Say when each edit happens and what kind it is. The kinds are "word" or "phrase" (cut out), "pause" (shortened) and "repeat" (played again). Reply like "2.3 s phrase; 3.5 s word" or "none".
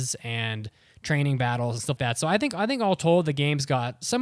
2.0 s word